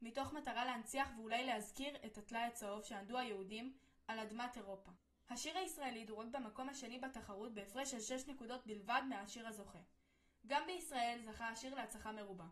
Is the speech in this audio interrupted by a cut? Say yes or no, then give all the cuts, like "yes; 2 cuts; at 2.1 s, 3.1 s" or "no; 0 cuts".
no; 0 cuts